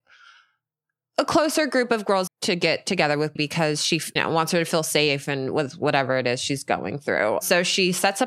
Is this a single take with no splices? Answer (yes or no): no